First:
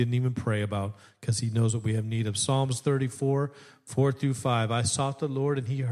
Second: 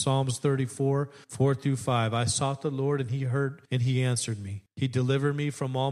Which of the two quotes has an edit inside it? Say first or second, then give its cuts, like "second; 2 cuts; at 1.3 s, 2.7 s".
second; 3 cuts; at 1.2 s, 3.6 s, 4.7 s